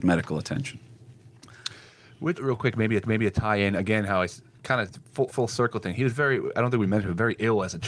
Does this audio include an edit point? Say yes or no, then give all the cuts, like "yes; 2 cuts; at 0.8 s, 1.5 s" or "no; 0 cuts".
yes; 3 cuts; at 2.3 s, 3.0 s, 5.3 s